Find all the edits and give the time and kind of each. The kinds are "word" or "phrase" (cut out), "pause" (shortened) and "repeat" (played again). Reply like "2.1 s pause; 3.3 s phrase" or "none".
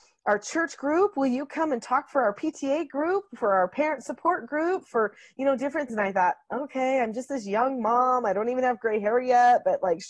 5.9 s word